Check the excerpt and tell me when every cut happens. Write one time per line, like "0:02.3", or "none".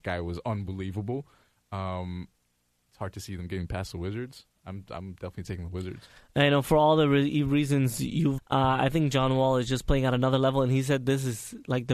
0:08.4